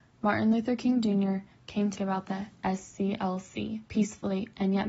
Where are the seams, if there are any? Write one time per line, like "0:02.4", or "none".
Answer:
0:02.0
0:03.9